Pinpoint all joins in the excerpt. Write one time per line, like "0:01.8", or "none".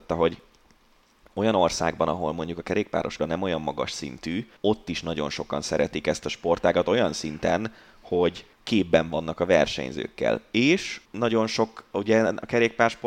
0:03.2
0:04.6
0:08.5
0:11.0